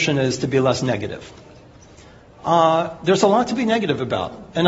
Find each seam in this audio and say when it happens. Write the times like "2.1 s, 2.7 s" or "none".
none